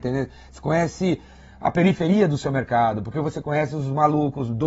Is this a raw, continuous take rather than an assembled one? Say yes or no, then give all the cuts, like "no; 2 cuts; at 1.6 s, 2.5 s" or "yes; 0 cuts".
yes; 0 cuts